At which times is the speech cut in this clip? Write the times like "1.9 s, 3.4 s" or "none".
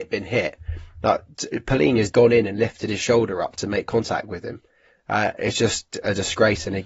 2.1 s